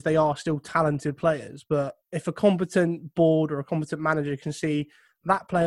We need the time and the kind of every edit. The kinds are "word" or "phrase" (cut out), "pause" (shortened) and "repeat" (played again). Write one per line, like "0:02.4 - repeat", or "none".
0:02.0 - pause